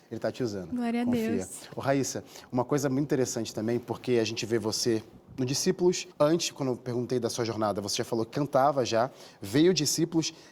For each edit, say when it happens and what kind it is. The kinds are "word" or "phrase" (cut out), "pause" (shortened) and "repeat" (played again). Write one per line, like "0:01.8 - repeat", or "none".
0:06.1 - pause